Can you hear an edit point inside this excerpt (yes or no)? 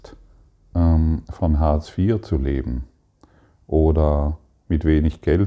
no